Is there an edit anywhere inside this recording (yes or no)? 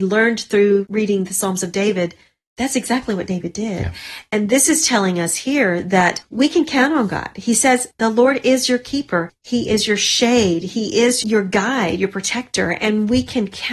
no